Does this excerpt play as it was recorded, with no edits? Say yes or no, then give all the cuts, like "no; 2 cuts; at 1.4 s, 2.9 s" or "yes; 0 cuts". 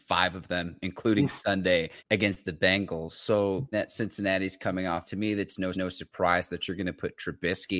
no; 4 cuts; at 2.0 s, 3.7 s, 5.0 s, 5.7 s